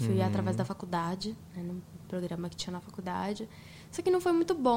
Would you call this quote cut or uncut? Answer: uncut